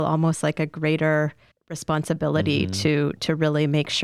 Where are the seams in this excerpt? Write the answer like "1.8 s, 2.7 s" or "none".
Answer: 1.5 s